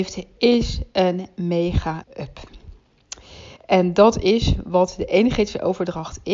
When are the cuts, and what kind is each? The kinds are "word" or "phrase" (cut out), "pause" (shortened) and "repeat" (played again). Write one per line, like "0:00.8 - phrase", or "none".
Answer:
0:02.0 - word